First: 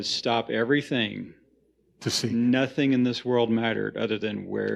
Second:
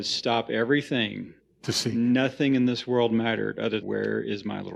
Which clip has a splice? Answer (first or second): second